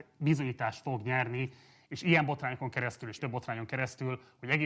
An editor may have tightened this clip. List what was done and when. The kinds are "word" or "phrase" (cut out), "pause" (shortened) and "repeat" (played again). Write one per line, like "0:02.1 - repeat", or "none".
0:03.2 - word